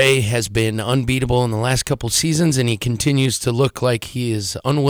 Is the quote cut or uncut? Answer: uncut